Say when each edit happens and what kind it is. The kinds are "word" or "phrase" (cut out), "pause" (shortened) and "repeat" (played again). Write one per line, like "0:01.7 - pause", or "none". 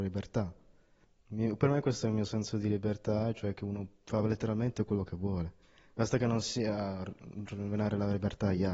none